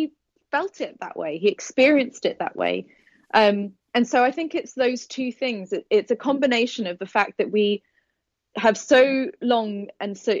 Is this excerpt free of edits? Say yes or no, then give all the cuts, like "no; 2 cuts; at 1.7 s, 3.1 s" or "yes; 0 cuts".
no; 1 cut; at 8.5 s